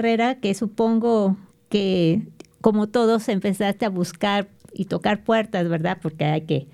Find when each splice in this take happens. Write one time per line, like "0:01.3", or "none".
none